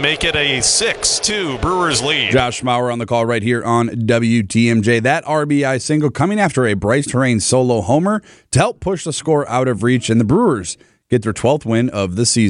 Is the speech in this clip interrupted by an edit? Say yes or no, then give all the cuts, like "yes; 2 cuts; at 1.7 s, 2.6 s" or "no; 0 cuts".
no; 0 cuts